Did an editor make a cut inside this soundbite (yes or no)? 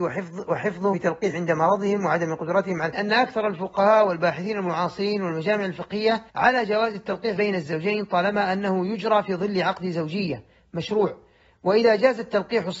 yes